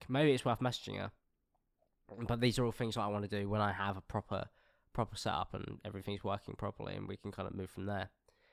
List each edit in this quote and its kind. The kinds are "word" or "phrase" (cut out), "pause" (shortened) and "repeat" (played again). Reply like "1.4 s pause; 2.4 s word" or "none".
none